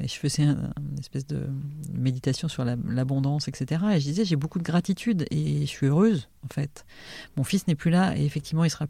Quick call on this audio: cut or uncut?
uncut